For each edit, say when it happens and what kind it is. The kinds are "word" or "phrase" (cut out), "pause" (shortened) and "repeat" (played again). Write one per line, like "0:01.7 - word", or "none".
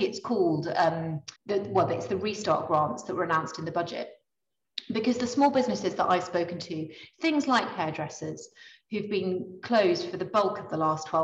0:01.4 - pause